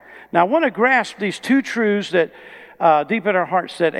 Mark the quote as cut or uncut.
uncut